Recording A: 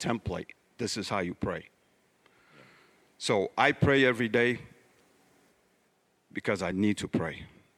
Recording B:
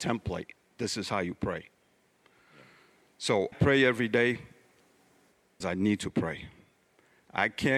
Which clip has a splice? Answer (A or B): B